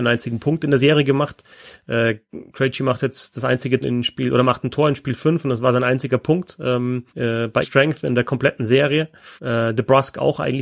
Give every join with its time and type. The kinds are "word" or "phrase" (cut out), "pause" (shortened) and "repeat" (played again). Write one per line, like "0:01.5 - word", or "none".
0:02.5 - pause
0:03.8 - phrase
0:07.1 - pause
0:07.6 - word
0:09.4 - pause